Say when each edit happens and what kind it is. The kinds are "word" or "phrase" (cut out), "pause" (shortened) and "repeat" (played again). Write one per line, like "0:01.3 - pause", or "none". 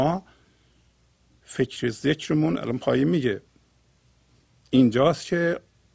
none